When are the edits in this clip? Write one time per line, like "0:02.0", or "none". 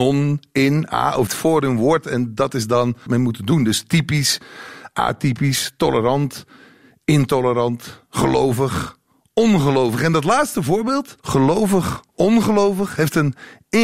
0:01.3
0:03.1
0:11.2